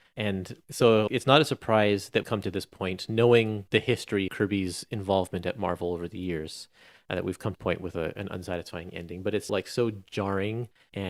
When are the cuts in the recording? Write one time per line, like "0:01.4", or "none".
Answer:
0:01.1
0:02.2
0:04.3
0:07.5
0:09.5